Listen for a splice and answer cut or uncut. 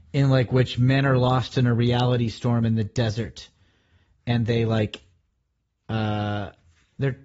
uncut